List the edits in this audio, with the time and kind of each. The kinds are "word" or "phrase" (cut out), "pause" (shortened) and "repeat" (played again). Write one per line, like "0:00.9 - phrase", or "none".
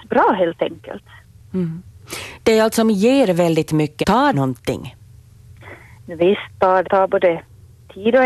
0:02.8 - word
0:04.0 - word
0:04.3 - word
0:06.8 - word